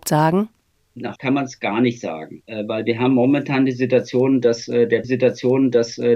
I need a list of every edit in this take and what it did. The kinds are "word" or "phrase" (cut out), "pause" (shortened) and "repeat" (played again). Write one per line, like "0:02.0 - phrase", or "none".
0:01.2 - word
0:05.0 - repeat

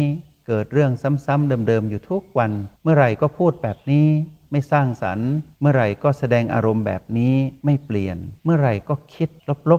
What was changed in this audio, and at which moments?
0:02.7 - pause
0:05.5 - pause
0:07.6 - pause
0:08.4 - pause

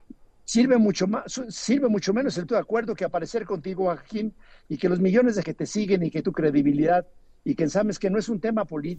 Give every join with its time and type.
0:02.5 - word
0:05.4 - word
0:06.2 - word

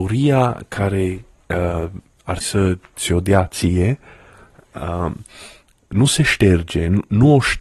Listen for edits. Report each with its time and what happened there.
0:02.4 - word

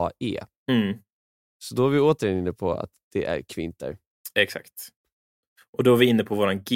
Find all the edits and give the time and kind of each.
none

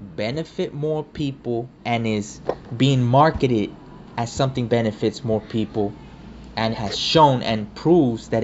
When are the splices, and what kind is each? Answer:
0:01.8 - pause
0:02.7 - word
0:04.7 - word
0:06.7 - word

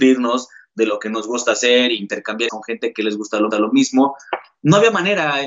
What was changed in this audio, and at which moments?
0:02.5 - word
0:03.5 - repeat

